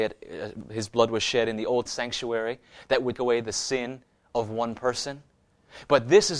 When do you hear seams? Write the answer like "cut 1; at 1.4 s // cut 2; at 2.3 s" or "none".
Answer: cut 1; at 1.9 s // cut 2; at 3.2 s